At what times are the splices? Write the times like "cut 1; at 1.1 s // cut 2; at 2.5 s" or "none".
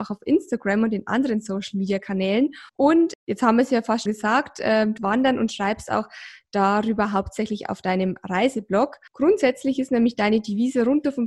cut 1; at 2.7 s // cut 2; at 4.1 s // cut 3; at 5.0 s // cut 4; at 9.1 s